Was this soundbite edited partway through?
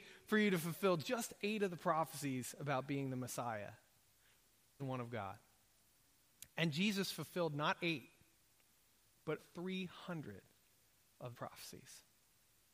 yes; 3 cuts; at 4.8 s, 9.4 s, 11.3 s

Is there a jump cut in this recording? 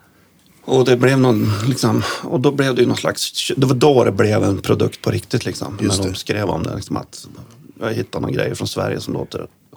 no; 0 cuts

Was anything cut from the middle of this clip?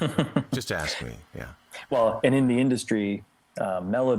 no; 0 cuts

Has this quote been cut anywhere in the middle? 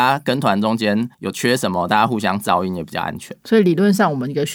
yes; 1 cut; at 1.1 s

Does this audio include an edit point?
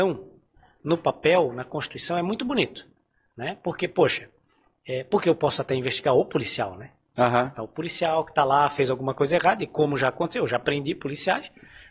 no; 0 cuts

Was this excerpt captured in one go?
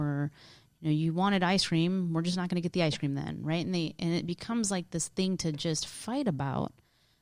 yes; 0 cuts

